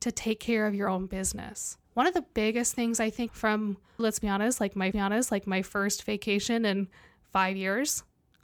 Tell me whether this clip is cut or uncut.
cut